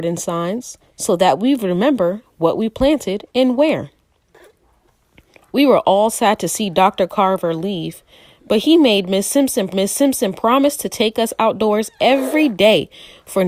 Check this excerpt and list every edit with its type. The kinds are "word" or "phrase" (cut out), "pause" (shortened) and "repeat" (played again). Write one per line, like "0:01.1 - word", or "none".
0:09.7 - repeat